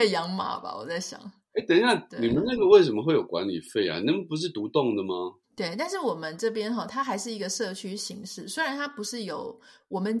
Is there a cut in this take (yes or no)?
yes